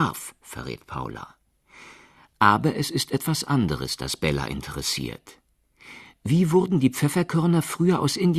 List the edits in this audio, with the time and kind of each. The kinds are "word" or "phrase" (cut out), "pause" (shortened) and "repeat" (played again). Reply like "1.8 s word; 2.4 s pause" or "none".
none